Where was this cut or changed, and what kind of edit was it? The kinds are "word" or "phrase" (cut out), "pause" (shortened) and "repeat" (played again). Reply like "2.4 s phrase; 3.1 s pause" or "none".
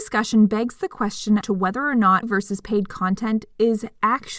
1.4 s word; 2.2 s word